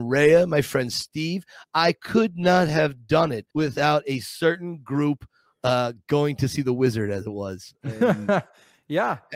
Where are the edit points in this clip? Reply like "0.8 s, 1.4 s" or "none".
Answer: 3.5 s